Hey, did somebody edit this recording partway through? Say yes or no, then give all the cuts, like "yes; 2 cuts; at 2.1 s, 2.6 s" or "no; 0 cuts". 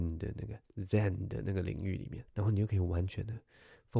yes; 1 cut; at 2.3 s